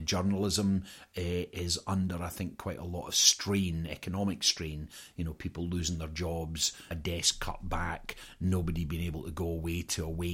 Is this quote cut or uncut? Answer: uncut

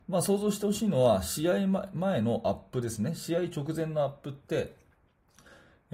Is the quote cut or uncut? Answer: uncut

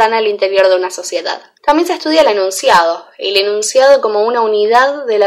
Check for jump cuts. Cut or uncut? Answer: cut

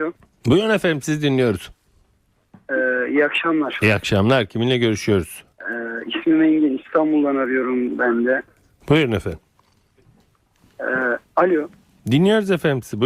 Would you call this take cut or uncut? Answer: cut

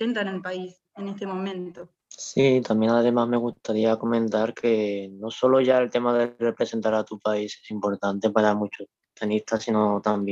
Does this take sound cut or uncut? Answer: cut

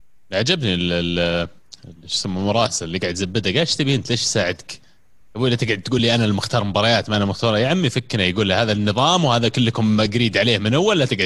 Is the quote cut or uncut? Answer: uncut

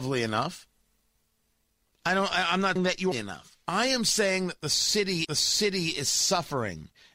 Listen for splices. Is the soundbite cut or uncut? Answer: cut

